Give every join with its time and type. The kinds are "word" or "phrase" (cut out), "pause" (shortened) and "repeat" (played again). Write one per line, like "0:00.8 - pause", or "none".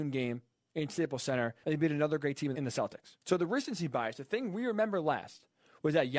0:01.6 - pause
0:02.5 - word
0:03.2 - pause